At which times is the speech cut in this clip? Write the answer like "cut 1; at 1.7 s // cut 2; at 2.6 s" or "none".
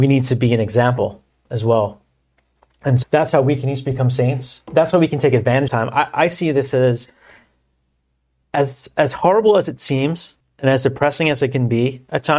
cut 1; at 3.0 s // cut 2; at 5.7 s // cut 3; at 10.4 s